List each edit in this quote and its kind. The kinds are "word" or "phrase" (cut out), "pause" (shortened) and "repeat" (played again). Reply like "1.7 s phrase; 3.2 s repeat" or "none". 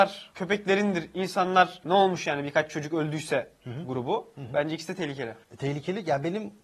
none